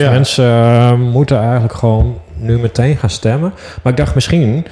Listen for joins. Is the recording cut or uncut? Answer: uncut